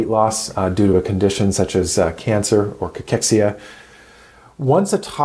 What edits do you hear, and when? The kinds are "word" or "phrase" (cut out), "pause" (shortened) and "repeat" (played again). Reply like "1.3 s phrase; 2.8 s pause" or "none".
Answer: none